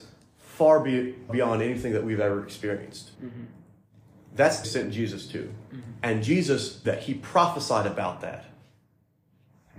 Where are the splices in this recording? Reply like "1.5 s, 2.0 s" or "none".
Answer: 1.3 s, 3.1 s, 4.6 s, 6.8 s

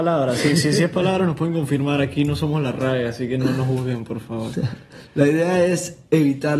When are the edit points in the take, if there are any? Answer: none

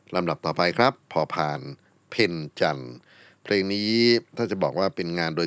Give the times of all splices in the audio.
1.0 s

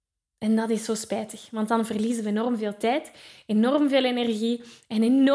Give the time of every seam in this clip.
none

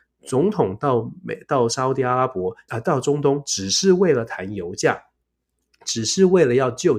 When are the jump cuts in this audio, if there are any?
2.7 s

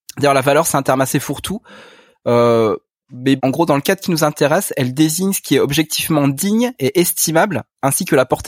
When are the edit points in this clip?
3.4 s

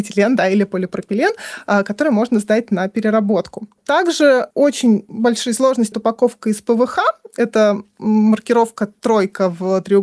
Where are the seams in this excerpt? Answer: 5.9 s

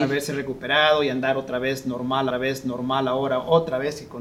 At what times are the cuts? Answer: 2.3 s

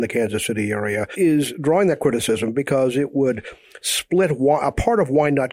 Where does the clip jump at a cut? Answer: none

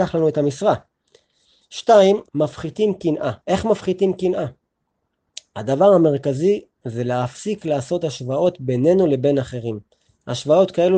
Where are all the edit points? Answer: 2.3 s, 3.4 s

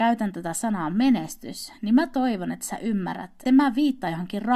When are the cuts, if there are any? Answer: 3.5 s

